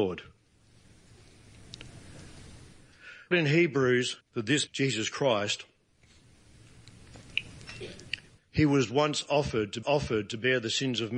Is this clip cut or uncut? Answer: cut